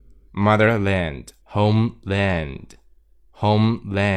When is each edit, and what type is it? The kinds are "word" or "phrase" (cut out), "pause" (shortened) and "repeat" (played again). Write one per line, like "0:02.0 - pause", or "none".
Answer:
0:01.4 - phrase